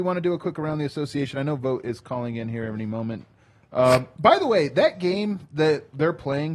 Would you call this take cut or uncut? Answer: uncut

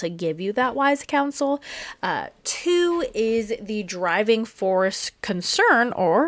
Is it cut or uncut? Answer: uncut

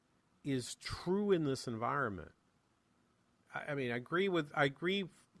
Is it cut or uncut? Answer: uncut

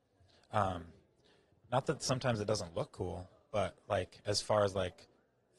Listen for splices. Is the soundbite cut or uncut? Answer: uncut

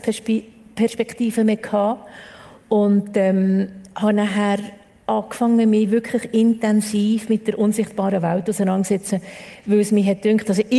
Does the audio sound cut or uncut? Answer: uncut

